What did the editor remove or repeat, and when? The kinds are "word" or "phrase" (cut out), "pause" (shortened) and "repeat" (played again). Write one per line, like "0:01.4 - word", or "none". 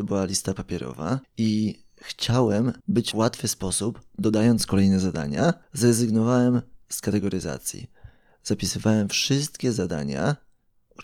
0:01.2 - pause
0:02.8 - pause
0:03.1 - phrase
0:05.6 - pause